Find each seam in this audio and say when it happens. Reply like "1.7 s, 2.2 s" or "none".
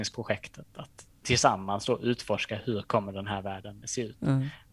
3.8 s